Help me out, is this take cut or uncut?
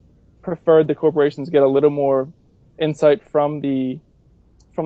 uncut